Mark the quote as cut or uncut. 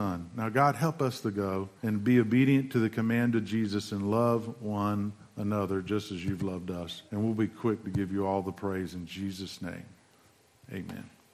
cut